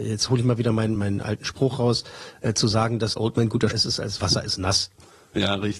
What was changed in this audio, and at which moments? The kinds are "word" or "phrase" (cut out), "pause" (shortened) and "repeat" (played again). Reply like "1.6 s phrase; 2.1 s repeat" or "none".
1.0 s word; 3.2 s word; 3.7 s word; 4.2 s phrase